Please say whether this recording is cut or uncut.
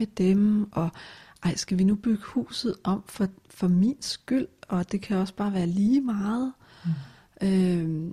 uncut